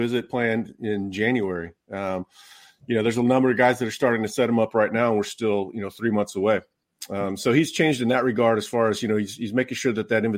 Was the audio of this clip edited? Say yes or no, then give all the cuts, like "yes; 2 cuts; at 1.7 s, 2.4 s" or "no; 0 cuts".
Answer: no; 0 cuts